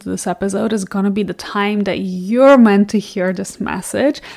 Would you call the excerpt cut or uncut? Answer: uncut